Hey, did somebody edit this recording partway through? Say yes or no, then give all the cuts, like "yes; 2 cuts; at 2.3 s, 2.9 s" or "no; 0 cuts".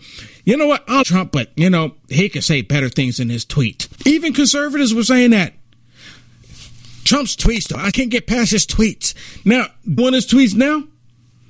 yes; 4 cuts; at 1.0 s, 4.0 s, 7.9 s, 10.0 s